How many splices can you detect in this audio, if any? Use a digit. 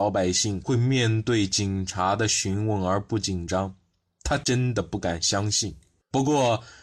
0